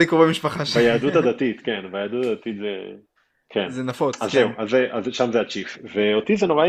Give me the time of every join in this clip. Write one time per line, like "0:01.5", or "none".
0:03.2